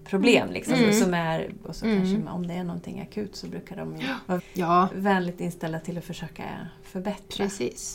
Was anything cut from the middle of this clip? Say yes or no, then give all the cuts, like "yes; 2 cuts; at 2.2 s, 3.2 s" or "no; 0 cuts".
yes; 1 cut; at 4.4 s